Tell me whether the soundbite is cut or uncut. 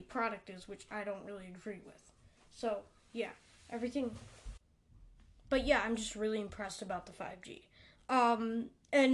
uncut